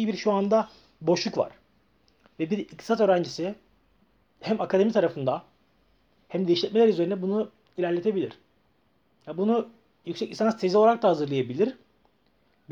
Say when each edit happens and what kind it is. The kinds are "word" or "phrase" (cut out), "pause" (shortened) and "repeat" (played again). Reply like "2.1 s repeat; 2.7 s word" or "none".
none